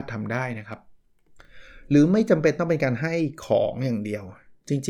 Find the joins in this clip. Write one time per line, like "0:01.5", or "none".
none